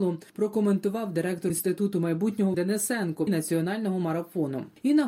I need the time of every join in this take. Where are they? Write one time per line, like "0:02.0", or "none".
0:01.5
0:02.5
0:03.3